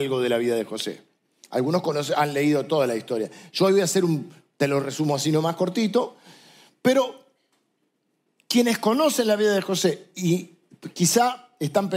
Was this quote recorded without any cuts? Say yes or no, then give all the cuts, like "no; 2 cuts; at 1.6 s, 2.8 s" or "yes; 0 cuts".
yes; 0 cuts